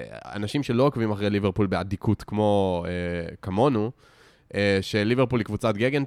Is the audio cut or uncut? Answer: uncut